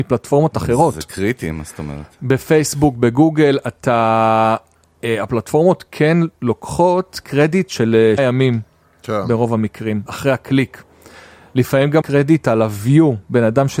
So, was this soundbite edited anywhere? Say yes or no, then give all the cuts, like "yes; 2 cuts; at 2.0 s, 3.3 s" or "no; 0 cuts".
yes; 3 cuts; at 8.2 s, 10.1 s, 12.0 s